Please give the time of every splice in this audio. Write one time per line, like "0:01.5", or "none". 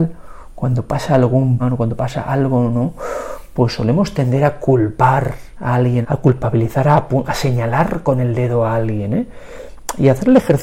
0:01.6
0:06.0
0:07.3